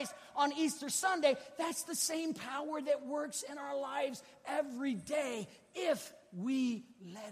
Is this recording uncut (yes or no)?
yes